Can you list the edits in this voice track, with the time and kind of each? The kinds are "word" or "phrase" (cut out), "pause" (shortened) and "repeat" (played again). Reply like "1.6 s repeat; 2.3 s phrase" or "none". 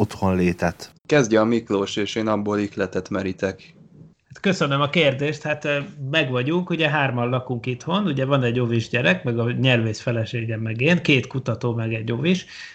1.0 s pause